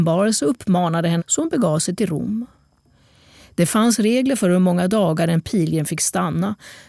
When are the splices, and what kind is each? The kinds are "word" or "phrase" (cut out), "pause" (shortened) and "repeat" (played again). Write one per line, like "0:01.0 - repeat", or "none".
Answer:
0:01.2 - phrase

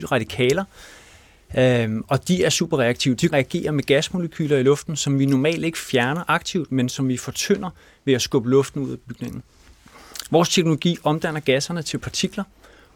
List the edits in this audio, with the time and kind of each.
0:03.3 - phrase

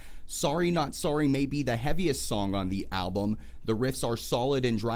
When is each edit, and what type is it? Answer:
none

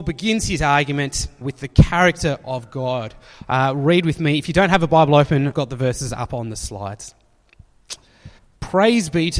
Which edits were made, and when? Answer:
0:01.4 - word
0:05.5 - word
0:08.4 - pause

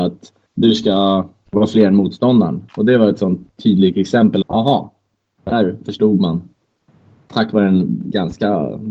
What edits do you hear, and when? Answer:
0:02.7 - pause
0:04.4 - word

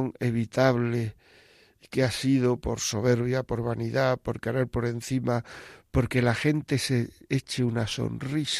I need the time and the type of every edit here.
none

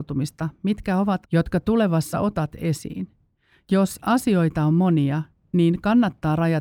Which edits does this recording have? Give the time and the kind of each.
0:01.2 - word
0:02.1 - word

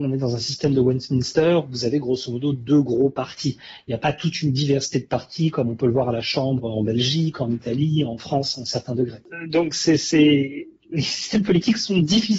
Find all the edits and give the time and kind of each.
none

